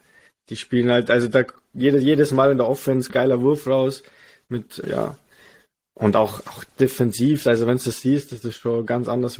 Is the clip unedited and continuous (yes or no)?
no